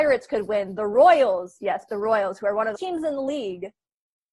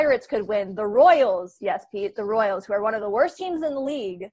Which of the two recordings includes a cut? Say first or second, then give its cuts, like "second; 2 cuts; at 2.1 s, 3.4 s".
first; 2 cuts; at 1.9 s, 2.8 s